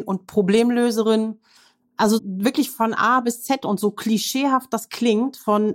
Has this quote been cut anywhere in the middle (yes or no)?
yes